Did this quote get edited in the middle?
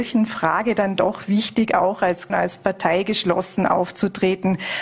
yes; 1 cut; at 2.3 s

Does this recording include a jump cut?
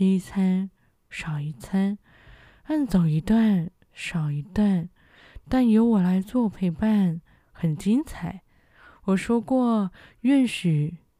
no; 0 cuts

